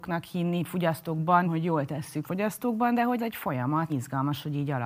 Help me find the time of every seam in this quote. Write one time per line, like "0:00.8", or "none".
0:01.4
0:02.2
0:03.2
0:03.9